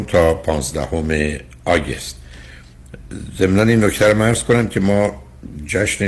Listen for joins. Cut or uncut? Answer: uncut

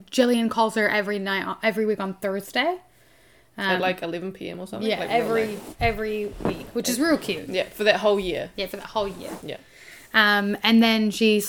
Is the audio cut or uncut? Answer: uncut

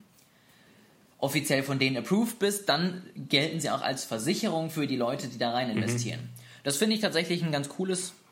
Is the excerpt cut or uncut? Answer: uncut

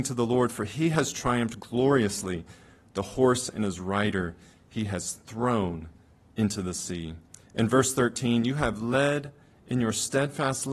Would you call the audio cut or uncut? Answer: uncut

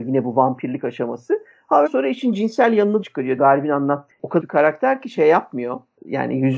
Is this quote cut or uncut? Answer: cut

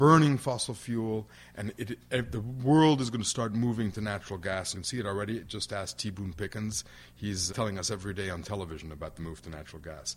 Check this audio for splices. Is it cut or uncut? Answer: cut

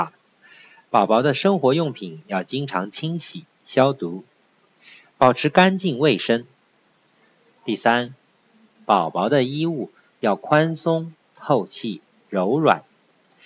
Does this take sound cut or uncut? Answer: uncut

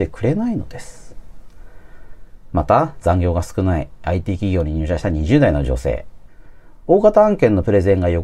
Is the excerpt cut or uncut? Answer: uncut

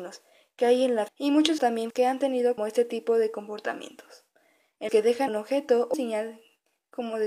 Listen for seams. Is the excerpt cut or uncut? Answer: cut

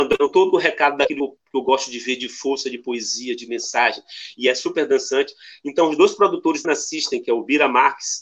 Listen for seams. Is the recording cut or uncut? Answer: cut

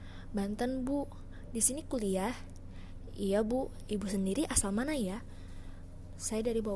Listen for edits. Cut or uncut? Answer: uncut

